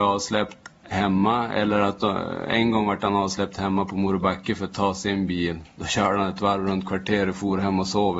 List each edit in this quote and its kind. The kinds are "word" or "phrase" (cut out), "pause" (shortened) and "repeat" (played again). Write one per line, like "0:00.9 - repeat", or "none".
none